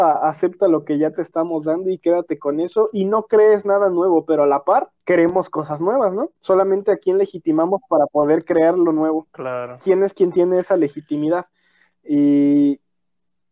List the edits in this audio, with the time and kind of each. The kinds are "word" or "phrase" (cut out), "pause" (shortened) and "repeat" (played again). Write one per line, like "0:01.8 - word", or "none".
0:05.0 - pause
0:06.4 - pause
0:09.3 - pause